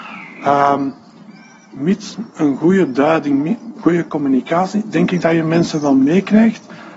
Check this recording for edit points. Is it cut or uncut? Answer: uncut